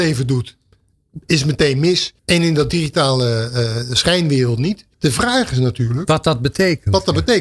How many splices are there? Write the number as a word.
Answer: two